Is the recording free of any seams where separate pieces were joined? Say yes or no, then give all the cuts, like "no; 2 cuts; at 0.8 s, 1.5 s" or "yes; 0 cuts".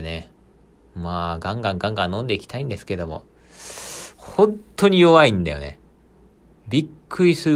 yes; 0 cuts